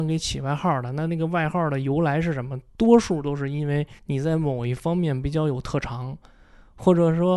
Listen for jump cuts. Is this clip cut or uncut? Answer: cut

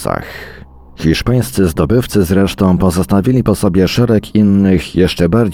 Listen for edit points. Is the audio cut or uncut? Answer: uncut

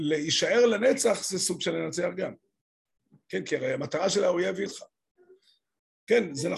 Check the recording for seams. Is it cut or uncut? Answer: cut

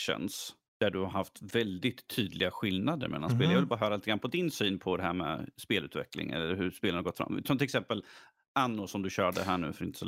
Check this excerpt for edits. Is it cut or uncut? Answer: uncut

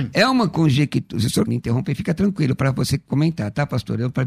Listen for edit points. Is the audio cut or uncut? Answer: cut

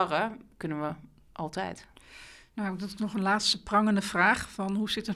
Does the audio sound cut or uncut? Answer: uncut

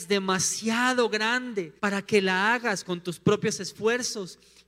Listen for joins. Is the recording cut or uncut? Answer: cut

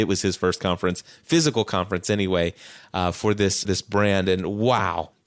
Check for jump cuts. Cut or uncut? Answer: cut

